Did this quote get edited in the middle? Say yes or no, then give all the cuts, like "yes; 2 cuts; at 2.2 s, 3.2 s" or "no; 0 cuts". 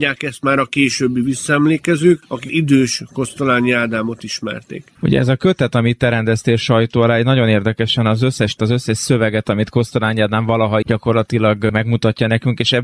yes; 3 cuts; at 2.5 s, 8.6 s, 10.8 s